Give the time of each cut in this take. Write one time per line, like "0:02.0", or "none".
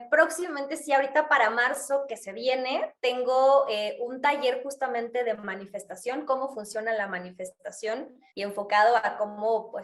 0:08.3